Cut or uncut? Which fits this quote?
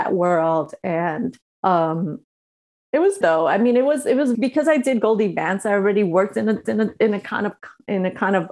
cut